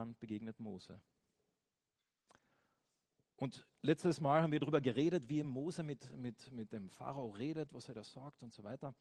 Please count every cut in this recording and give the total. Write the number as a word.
zero